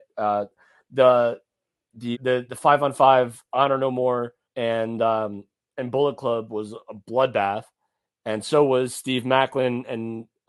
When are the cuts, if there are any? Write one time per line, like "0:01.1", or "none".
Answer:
0:02.1
0:04.4